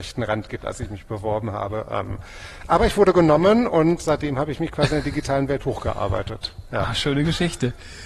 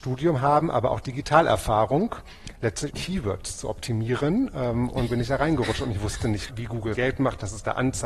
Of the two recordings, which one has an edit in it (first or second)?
second